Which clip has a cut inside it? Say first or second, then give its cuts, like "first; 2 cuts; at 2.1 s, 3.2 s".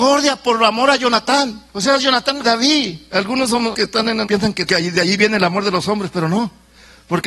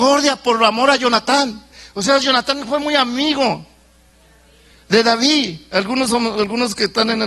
first; 5 cuts; at 1.7 s, 2.4 s, 3.7 s, 4.3 s, 4.7 s